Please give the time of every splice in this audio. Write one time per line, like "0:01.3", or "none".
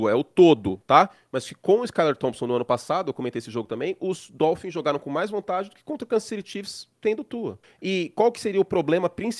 0:07.6